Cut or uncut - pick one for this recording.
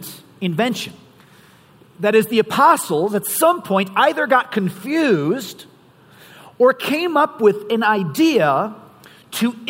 uncut